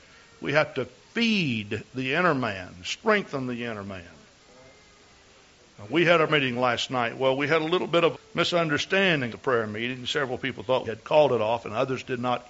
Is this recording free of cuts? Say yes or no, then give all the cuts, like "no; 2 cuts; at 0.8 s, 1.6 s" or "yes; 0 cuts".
no; 4 cuts; at 6.3 s, 8.1 s, 9.3 s, 10.8 s